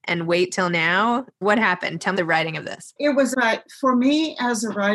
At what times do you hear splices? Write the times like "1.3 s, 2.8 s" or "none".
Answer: 1.4 s, 2.2 s, 3.0 s, 3.3 s